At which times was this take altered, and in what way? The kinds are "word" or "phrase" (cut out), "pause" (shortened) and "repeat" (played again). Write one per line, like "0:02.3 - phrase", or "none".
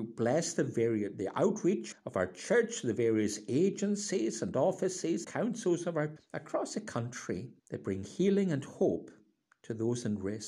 0:01.9 - word
0:05.2 - word
0:06.2 - word
0:07.6 - pause